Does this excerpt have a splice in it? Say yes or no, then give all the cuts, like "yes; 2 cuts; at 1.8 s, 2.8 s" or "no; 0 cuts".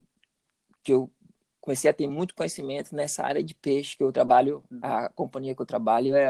no; 0 cuts